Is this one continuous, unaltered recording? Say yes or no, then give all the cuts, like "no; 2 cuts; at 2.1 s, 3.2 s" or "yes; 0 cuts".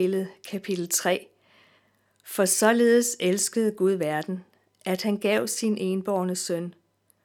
yes; 0 cuts